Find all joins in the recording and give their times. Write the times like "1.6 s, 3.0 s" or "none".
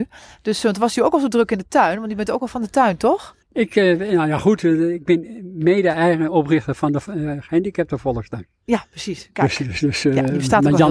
3.4 s